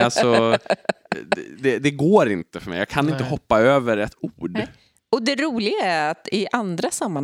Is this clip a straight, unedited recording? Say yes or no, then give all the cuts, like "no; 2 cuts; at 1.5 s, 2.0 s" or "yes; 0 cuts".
yes; 0 cuts